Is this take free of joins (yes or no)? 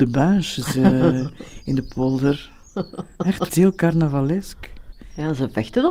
no